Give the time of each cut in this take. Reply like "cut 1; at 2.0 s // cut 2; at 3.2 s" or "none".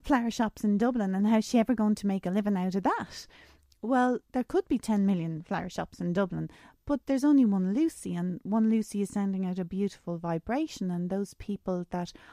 cut 1; at 4.2 s // cut 2; at 7.0 s